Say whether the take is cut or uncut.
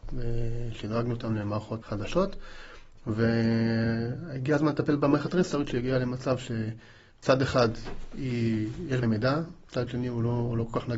cut